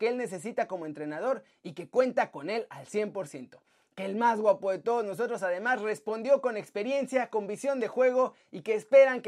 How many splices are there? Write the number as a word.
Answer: zero